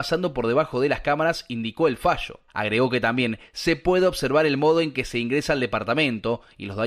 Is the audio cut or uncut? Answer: cut